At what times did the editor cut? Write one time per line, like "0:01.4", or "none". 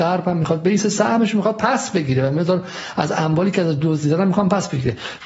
none